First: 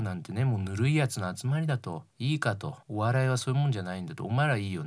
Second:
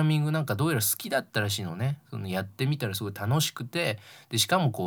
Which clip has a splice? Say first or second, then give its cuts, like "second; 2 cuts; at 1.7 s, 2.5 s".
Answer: first; 2 cuts; at 2.1 s, 2.8 s